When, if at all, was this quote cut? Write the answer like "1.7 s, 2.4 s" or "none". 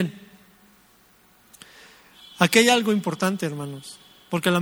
none